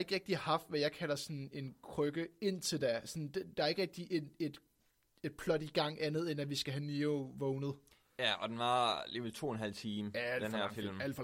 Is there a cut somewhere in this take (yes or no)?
no